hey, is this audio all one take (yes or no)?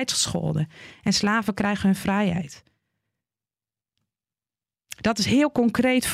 yes